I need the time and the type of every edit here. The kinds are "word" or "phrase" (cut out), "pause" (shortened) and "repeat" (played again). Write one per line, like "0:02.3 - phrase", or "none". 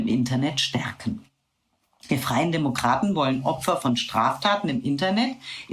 none